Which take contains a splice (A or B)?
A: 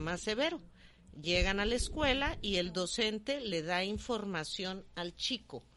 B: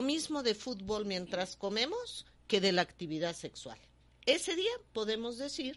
B